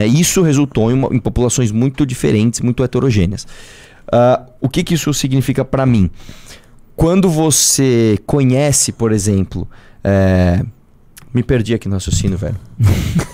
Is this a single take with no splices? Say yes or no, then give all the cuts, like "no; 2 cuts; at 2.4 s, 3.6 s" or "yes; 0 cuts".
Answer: yes; 0 cuts